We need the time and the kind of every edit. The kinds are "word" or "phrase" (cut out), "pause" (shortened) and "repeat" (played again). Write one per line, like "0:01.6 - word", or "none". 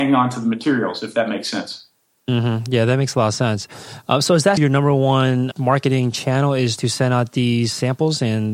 0:04.6 - word
0:05.5 - word